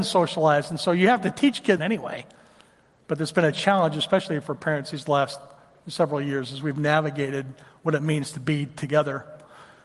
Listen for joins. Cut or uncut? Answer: cut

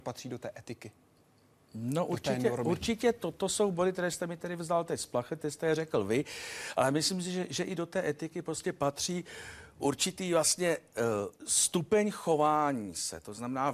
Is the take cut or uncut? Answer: cut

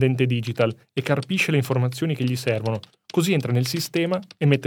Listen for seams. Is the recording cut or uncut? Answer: uncut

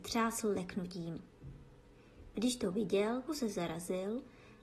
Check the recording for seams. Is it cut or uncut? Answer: cut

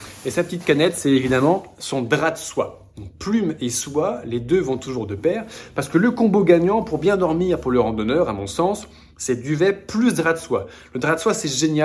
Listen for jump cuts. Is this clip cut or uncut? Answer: uncut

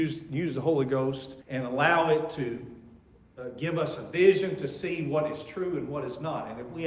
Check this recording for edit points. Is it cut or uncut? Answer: cut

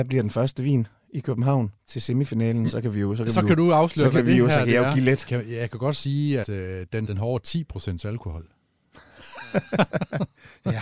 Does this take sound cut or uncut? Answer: cut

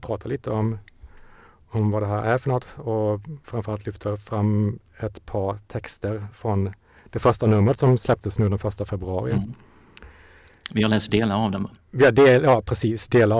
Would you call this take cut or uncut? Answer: cut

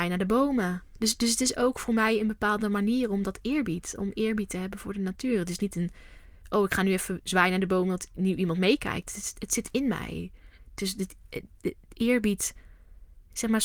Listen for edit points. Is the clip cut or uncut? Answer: uncut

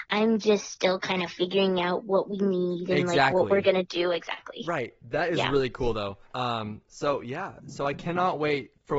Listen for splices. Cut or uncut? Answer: cut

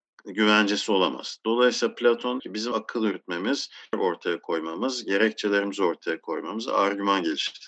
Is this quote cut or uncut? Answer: cut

